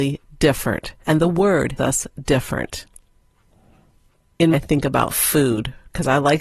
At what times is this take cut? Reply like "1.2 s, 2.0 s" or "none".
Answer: 1.0 s, 1.8 s, 4.5 s